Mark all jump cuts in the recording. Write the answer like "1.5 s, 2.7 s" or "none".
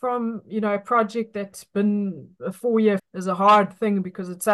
3.0 s